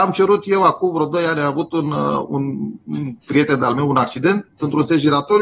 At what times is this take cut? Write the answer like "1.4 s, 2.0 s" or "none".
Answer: 3.2 s